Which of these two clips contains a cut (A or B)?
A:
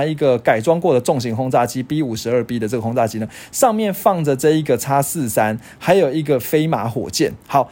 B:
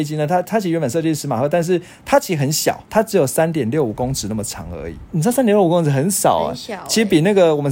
B